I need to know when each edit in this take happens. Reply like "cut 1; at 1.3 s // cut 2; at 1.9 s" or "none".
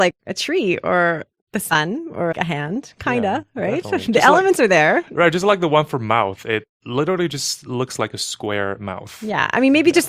cut 1; at 2.3 s